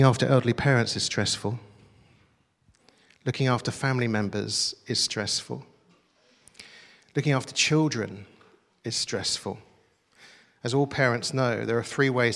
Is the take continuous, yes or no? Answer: yes